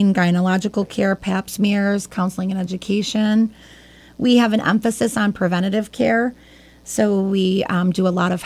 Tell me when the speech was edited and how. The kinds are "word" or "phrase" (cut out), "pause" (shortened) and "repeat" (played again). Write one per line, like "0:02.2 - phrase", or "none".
none